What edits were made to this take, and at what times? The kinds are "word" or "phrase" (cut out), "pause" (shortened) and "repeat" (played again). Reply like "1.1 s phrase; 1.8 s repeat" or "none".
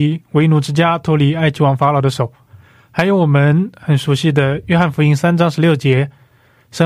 none

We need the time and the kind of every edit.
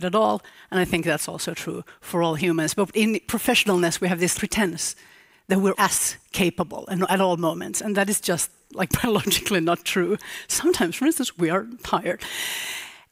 4.4 s word; 5.7 s word

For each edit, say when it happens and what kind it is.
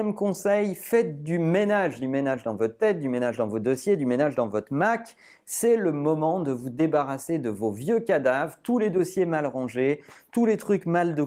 none

